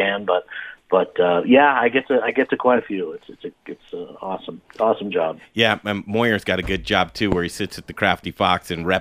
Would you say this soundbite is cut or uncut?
uncut